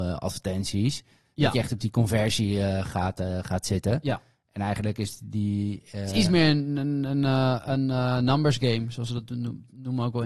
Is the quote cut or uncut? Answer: uncut